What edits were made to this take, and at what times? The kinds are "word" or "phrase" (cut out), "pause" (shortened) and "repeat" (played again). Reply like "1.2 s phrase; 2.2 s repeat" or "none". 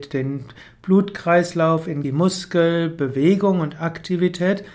2.0 s phrase